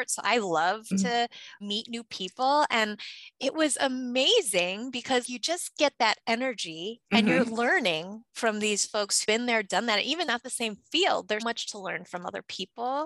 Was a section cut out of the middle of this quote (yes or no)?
yes